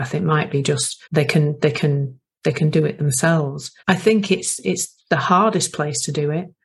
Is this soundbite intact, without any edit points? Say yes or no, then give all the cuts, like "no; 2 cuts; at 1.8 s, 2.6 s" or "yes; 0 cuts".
no; 2 cuts; at 1.0 s, 3.8 s